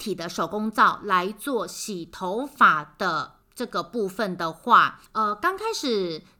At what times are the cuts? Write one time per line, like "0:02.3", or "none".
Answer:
0:03.4
0:05.1